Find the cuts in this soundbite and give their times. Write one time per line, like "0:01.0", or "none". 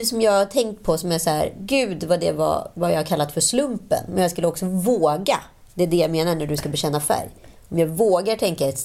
none